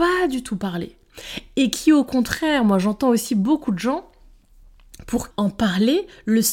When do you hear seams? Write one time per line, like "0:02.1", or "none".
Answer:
0:05.3